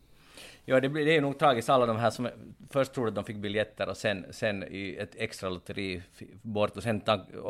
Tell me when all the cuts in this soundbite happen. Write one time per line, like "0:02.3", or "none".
none